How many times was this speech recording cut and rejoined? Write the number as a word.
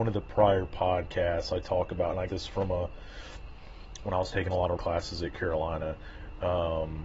two